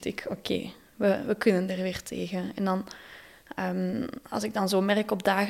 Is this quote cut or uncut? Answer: uncut